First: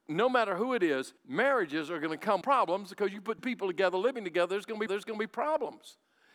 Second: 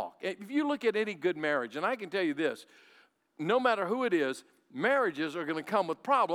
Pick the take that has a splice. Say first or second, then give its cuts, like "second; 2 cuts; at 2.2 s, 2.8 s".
first; 4 cuts; at 1.2 s, 2.4 s, 3.4 s, 4.9 s